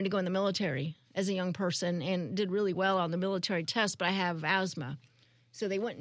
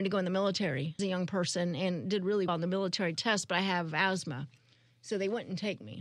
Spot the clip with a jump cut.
second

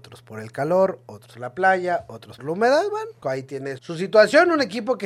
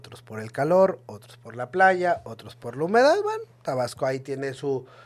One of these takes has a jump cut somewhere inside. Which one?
first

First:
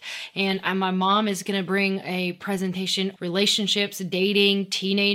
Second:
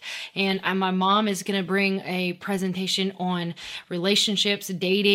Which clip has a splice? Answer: first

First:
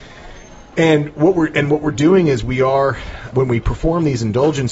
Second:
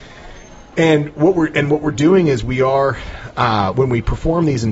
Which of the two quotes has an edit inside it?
first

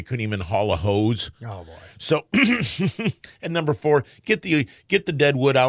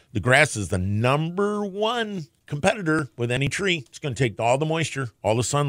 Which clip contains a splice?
second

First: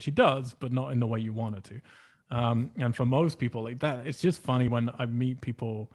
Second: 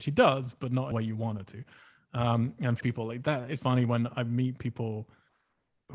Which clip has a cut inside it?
second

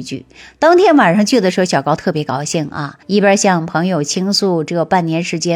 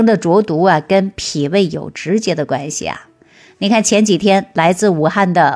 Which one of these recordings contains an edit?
first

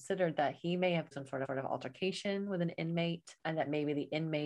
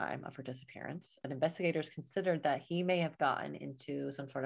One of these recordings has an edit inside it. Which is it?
first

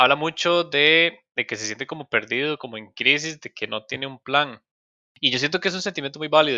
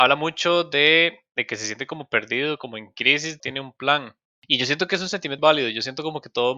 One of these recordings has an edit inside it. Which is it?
second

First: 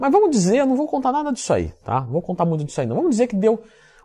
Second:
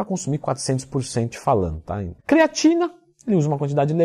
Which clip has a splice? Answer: second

